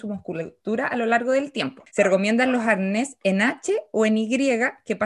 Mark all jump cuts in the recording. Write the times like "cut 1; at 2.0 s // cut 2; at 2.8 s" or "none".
cut 1; at 1.9 s